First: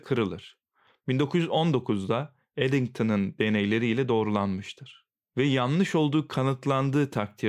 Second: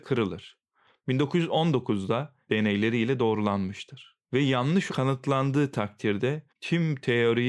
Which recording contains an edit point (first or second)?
second